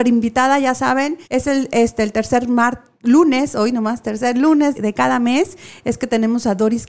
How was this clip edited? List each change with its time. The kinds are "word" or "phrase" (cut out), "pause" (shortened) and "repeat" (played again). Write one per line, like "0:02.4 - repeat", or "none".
0:01.2 - pause
0:04.7 - word